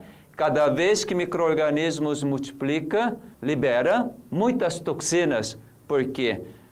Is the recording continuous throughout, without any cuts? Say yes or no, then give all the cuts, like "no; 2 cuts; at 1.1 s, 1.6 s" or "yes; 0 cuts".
no; 1 cut; at 3.3 s